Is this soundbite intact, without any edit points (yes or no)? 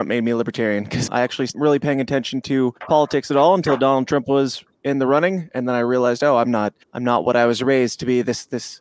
no